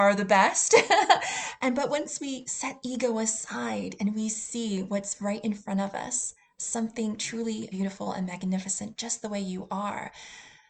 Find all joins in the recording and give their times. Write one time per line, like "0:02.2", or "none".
0:07.7